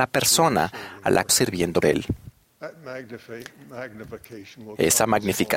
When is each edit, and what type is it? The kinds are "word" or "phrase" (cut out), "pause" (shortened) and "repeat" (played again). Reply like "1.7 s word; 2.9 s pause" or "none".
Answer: 1.3 s word; 1.8 s word